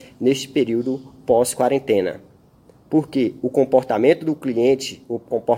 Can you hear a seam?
no; 0 cuts

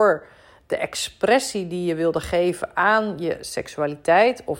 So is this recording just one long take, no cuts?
yes; 0 cuts

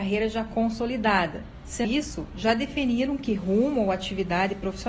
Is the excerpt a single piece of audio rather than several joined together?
no; 1 cut; at 1.8 s

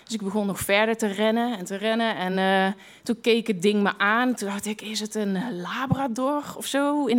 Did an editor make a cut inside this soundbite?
no; 0 cuts

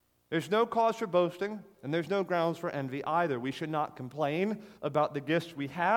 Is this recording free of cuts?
no; 1 cut; at 4.8 s

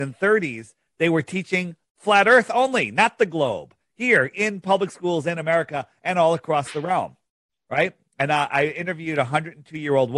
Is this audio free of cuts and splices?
yes; 0 cuts

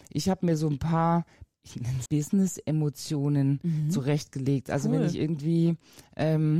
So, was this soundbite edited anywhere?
yes; 2 cuts; at 1.5 s, 2.1 s

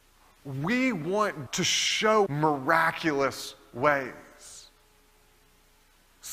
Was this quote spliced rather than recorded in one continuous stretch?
yes; 2 cuts; at 1.5 s, 2.3 s

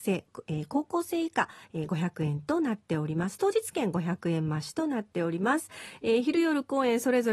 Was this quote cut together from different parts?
no; 0 cuts

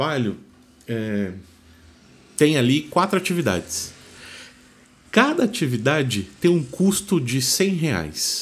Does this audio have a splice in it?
no; 0 cuts

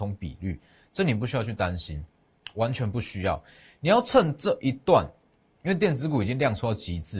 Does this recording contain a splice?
no; 0 cuts

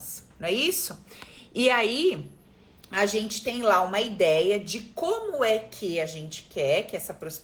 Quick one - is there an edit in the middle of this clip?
no; 0 cuts

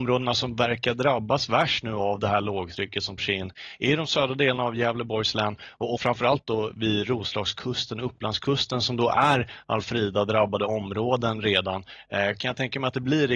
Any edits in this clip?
yes; 2 cuts; at 3.2 s, 6.0 s

